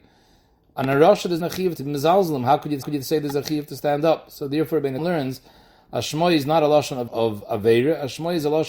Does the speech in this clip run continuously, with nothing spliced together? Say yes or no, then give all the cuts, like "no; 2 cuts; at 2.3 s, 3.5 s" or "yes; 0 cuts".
no; 5 cuts; at 1.4 s, 1.8 s, 2.8 s, 5.0 s, 7.1 s